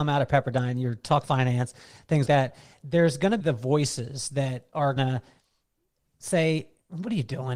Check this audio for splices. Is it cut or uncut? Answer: cut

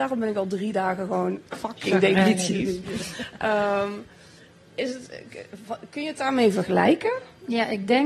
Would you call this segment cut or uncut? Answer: cut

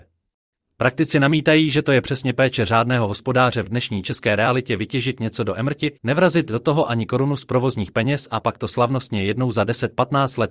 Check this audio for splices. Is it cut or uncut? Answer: cut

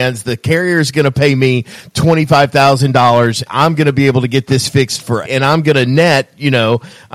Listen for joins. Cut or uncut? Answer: cut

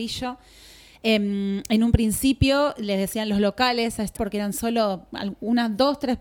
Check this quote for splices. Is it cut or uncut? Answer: cut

